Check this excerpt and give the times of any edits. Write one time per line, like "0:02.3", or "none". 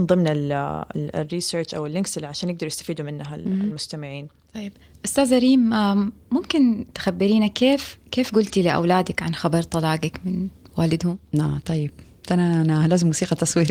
none